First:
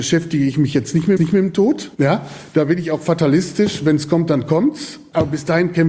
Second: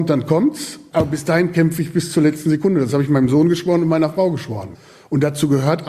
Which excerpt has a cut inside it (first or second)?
first